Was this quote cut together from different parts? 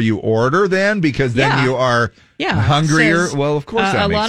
no; 0 cuts

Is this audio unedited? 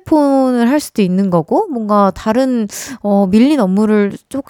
yes; 0 cuts

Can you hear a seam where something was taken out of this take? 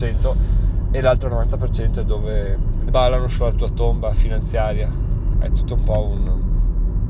yes; 2 cuts; at 2.9 s, 5.3 s

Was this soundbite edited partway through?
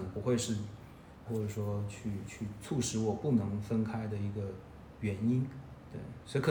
yes; 1 cut; at 1.2 s

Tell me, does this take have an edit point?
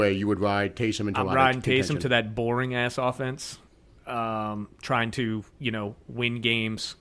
no; 0 cuts

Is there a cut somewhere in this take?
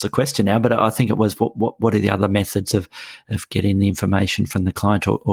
no; 0 cuts

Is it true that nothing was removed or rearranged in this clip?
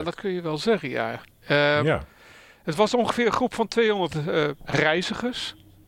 yes; 0 cuts

